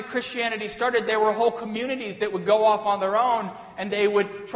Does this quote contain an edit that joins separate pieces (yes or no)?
no